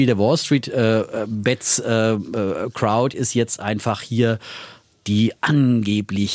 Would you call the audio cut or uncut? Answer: uncut